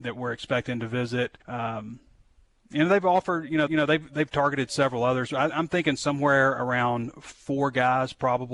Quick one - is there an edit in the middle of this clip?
yes; 2 cuts; at 1.4 s, 3.7 s

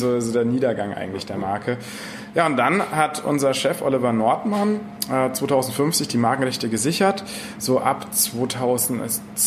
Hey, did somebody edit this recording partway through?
no; 0 cuts

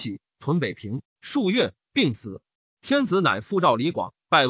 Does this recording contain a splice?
no; 0 cuts

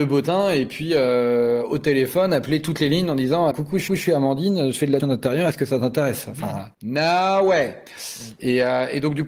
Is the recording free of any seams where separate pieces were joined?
no; 5 cuts; at 3.5 s, 3.9 s, 5.0 s, 6.7 s, 7.9 s

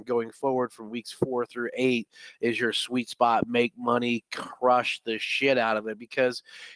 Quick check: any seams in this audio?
no; 0 cuts

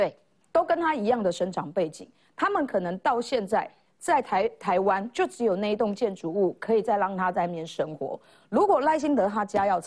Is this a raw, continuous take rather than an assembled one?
yes; 0 cuts

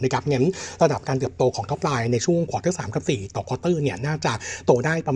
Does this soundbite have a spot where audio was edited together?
no; 0 cuts

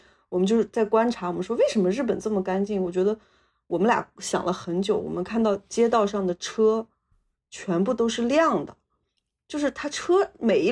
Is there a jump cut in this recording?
no; 0 cuts

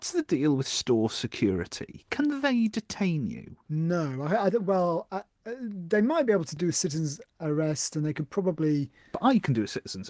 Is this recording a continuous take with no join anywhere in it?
no; 1 cut; at 3.6 s

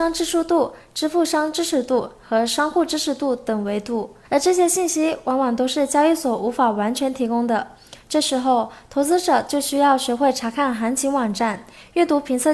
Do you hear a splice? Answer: yes; 1 cut; at 4.2 s

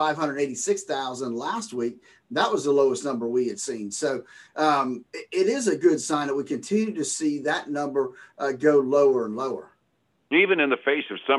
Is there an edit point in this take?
no; 0 cuts

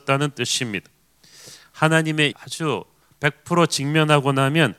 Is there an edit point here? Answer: yes; 1 cut; at 2.3 s

